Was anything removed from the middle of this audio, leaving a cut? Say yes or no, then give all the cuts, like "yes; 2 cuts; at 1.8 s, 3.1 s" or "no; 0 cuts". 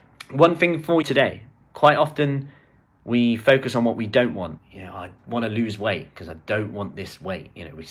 yes; 4 cuts; at 1.0 s, 1.7 s, 4.6 s, 5.2 s